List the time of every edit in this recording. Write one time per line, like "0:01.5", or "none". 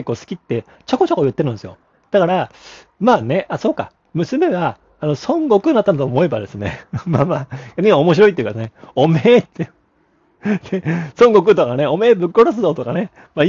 none